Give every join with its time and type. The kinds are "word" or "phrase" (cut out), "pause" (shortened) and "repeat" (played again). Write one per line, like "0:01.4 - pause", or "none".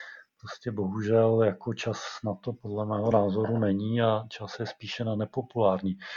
none

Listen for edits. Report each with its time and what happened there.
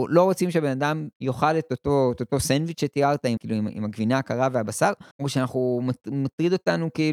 0:01.1 - pause
0:03.4 - word
0:05.1 - pause

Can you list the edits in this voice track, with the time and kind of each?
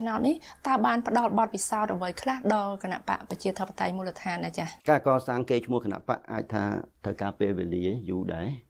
0:04.8 - pause

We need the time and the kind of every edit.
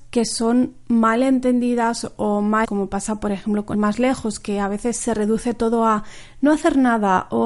0:02.6 - word
0:03.7 - phrase

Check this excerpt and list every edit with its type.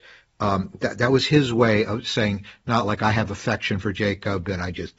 none

